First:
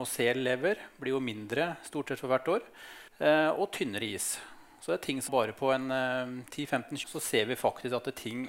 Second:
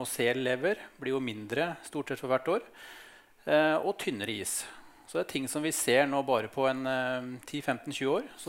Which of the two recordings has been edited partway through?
first; 3 cuts; at 3.1 s, 5.3 s, 7.0 s

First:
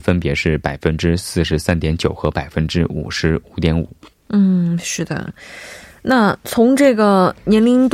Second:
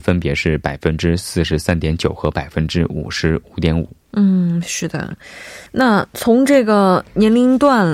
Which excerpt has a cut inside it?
second; 2 cuts; at 4.0 s, 5.7 s

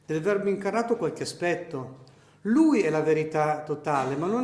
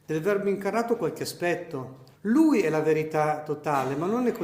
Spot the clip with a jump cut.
second; 1 cut; at 2.1 s

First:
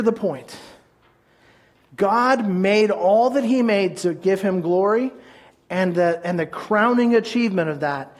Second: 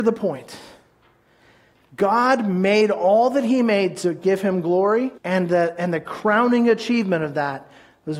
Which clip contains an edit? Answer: second; 1 cut; at 5.2 s

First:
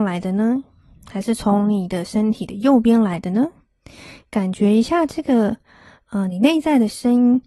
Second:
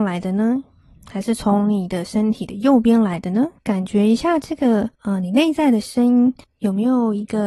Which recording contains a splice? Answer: second; 3 cuts; at 3.6 s, 4.9 s, 6.4 s

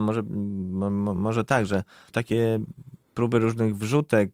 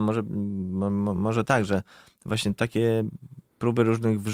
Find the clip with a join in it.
first; 1 cut; at 2.1 s

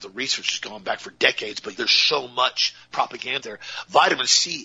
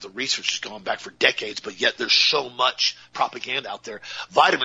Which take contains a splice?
first; 2 cuts; at 1.8 s, 3.4 s

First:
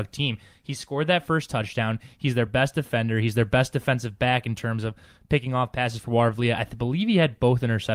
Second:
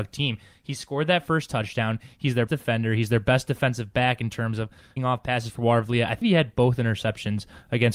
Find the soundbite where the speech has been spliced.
second; 3 cuts; at 2.5 s, 5.0 s, 6.2 s

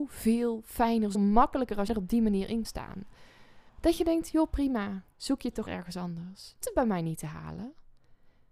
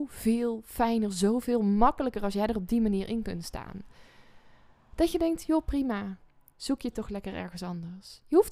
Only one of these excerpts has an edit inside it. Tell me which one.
first; 7 cuts; at 1.1 s, 1.9 s, 2.6 s, 3.7 s, 5.1 s, 5.7 s, 6.6 s

